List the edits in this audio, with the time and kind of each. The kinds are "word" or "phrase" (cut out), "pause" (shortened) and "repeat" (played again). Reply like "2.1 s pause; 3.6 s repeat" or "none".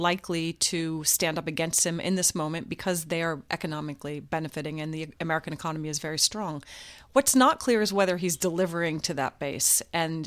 none